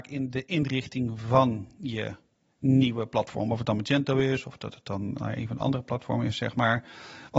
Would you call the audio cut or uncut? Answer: uncut